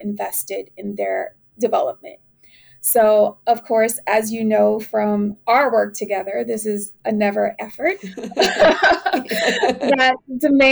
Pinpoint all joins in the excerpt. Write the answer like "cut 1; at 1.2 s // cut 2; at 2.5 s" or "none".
cut 1; at 7.5 s

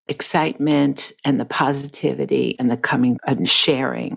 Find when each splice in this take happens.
cut 1; at 3.2 s

